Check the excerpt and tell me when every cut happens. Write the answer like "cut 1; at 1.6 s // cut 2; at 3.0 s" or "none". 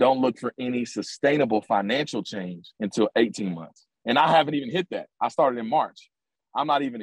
cut 1; at 2.7 s // cut 2; at 4.0 s